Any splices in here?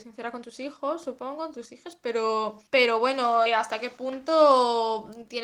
yes; 2 cuts; at 2.7 s, 3.5 s

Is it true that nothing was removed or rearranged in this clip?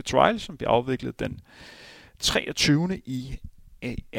yes; 0 cuts

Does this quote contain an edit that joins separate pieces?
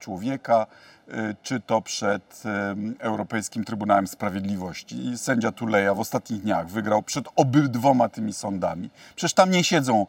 no; 0 cuts

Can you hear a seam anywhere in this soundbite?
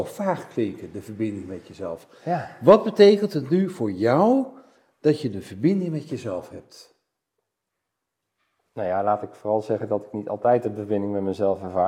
no; 0 cuts

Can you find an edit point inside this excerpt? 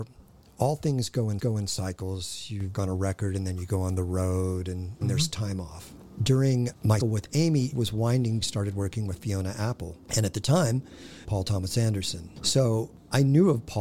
yes; 7 cuts; at 1.4 s, 2.7 s, 5.0 s, 7.0 s, 7.7 s, 8.4 s, 11.2 s

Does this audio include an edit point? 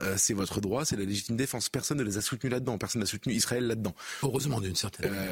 no; 0 cuts

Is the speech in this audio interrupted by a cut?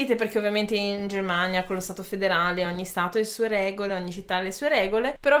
no; 0 cuts

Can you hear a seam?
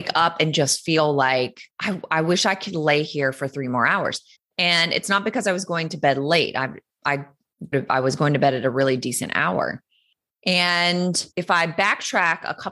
yes; 4 cuts; at 1.7 s, 4.3 s, 7.7 s, 11.3 s

